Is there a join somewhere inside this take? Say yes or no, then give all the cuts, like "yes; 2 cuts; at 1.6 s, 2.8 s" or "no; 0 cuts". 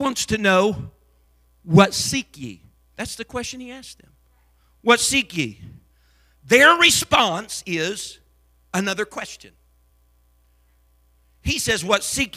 no; 0 cuts